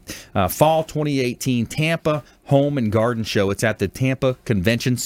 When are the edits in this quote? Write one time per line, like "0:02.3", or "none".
none